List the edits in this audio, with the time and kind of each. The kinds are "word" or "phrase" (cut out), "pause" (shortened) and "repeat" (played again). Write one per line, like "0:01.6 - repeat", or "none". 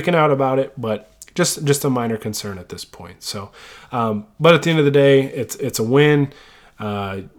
none